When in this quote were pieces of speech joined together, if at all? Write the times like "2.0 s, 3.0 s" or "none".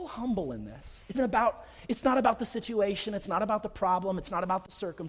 1.1 s